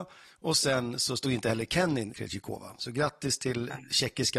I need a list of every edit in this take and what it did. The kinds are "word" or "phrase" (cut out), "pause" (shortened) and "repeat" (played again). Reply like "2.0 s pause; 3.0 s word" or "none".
2.1 s word